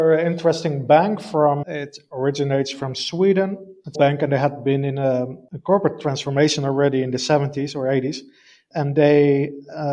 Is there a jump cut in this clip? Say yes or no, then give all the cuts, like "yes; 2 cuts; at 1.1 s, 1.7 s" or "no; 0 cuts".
yes; 2 cuts; at 1.6 s, 3.9 s